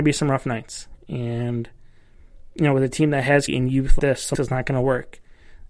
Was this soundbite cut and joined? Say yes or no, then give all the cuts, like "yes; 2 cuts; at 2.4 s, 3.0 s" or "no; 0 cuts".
yes; 3 cuts; at 3.5 s, 4.0 s, 4.3 s